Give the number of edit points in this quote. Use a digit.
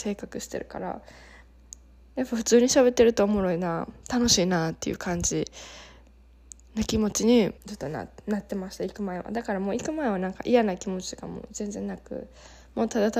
1